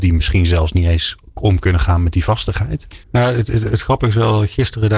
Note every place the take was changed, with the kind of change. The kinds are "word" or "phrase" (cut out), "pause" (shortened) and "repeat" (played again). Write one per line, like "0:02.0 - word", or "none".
0:03.0 - pause